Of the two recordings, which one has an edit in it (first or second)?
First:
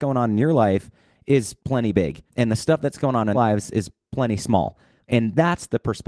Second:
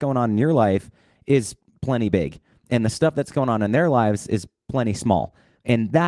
first